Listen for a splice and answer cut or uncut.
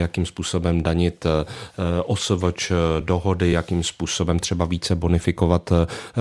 uncut